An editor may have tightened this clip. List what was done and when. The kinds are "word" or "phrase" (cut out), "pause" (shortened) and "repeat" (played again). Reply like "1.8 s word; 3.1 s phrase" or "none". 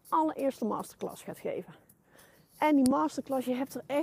none